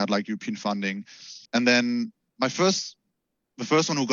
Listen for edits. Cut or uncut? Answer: cut